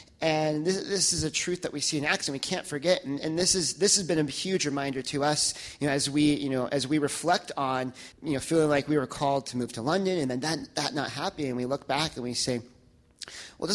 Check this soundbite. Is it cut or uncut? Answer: cut